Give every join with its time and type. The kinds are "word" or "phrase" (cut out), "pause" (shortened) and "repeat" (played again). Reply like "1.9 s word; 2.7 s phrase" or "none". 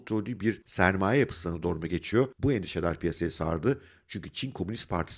none